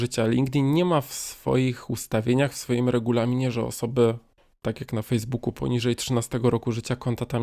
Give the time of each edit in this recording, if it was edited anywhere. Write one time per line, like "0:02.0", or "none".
none